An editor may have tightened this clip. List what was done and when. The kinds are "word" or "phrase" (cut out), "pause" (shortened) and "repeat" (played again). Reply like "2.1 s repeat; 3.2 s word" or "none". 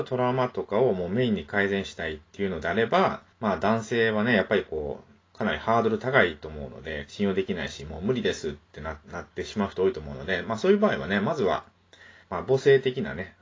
3.3 s pause; 7.1 s phrase; 9.0 s pause; 12.2 s pause